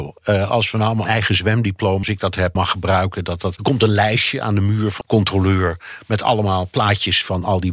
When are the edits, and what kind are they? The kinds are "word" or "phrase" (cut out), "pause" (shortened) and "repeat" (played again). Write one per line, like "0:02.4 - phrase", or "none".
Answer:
0:01.1 - phrase
0:02.0 - word
0:02.6 - word
0:03.6 - word
0:05.0 - word